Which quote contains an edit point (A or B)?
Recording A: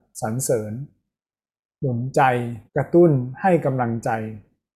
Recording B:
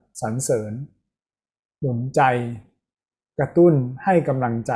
A